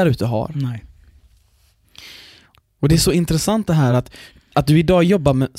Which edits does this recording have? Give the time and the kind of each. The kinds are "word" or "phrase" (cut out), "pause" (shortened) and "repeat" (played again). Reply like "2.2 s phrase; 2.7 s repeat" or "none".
none